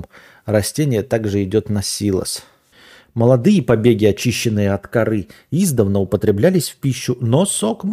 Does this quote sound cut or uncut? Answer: cut